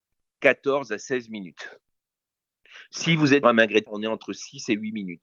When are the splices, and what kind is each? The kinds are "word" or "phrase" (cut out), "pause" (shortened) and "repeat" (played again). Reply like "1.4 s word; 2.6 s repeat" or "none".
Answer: 3.4 s word; 3.9 s word